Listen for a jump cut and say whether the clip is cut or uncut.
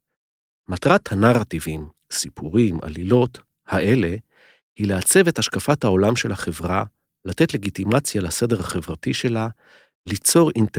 uncut